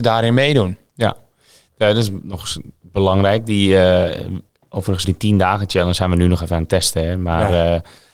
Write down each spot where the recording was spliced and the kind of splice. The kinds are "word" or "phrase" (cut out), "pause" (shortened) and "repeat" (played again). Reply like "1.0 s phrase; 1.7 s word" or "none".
5.0 s word